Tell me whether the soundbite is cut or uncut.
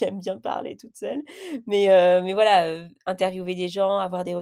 uncut